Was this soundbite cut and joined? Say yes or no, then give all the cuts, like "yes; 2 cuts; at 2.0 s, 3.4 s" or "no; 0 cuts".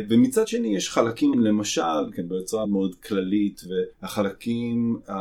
yes; 4 cuts; at 1.3 s, 2.1 s, 2.6 s, 3.9 s